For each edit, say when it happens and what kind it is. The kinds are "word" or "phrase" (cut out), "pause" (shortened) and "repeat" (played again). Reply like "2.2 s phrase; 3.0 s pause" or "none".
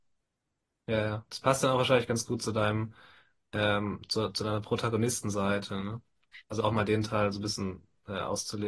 none